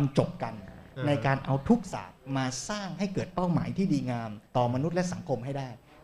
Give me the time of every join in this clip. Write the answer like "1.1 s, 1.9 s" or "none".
4.5 s